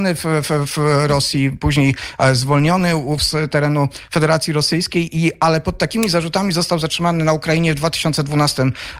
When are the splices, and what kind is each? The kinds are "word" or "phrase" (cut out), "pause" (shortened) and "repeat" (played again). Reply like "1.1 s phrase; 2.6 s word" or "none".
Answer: 3.2 s word